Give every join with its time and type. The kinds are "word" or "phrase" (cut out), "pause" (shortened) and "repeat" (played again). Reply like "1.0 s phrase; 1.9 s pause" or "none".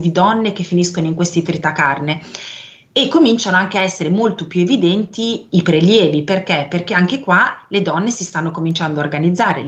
5.5 s word